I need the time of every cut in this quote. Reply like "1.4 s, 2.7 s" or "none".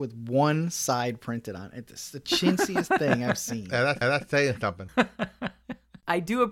4.0 s